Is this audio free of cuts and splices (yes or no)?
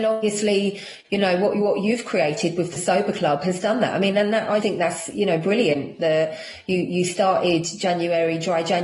no